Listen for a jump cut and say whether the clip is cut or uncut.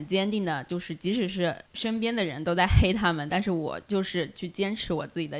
cut